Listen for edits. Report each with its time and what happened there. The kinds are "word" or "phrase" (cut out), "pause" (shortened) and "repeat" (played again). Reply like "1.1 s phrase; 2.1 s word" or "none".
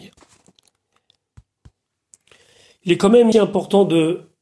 3.3 s word